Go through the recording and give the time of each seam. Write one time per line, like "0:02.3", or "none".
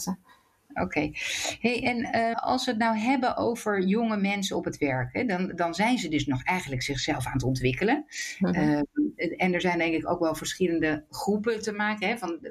0:02.3